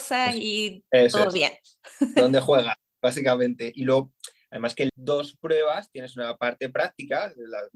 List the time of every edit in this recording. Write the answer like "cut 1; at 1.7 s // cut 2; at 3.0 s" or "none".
cut 1; at 4.9 s